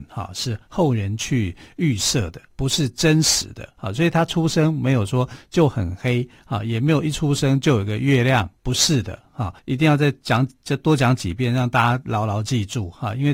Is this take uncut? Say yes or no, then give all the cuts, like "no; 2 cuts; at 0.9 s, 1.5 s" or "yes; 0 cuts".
no; 4 cuts; at 2.5 s, 3.8 s, 8.6 s, 9.6 s